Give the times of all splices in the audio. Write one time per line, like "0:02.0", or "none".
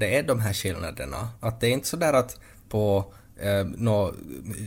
0:02.6